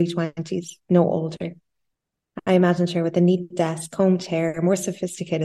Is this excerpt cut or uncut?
uncut